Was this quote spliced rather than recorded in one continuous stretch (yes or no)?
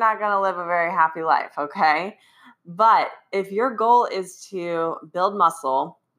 no